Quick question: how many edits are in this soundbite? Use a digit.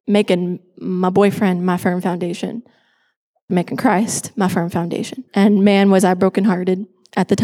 2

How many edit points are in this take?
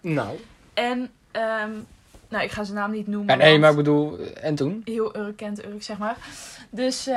0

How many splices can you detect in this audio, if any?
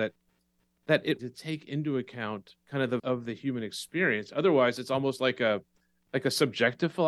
3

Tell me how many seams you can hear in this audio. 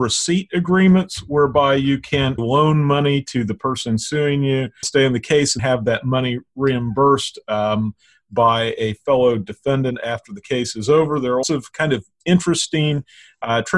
4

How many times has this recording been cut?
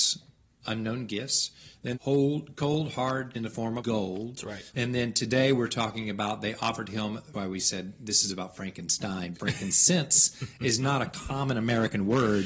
6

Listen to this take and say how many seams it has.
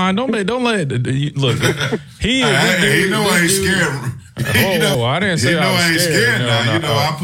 1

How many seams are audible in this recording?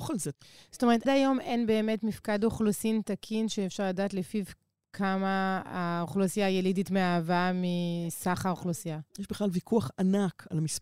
2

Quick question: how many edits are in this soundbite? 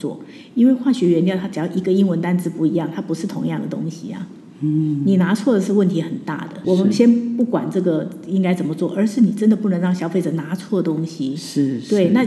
1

